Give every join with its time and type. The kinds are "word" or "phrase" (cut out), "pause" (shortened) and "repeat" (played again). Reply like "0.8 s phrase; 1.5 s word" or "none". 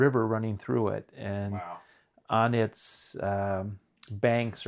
none